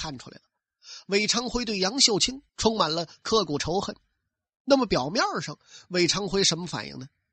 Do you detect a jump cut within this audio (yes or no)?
yes